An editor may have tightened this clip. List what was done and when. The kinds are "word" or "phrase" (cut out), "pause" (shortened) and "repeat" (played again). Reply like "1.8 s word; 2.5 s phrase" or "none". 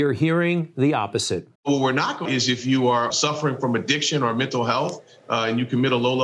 1.6 s pause; 2.3 s phrase; 3.1 s word